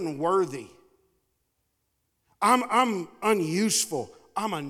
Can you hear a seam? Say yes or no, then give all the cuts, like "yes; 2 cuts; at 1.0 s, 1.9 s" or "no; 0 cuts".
no; 0 cuts